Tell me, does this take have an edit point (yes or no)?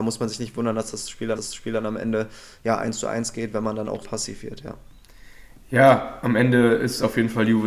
yes